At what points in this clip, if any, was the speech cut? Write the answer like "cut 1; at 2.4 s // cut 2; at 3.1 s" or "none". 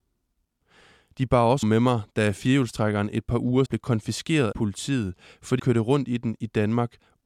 cut 1; at 1.6 s // cut 2; at 3.7 s // cut 3; at 4.5 s // cut 4; at 5.6 s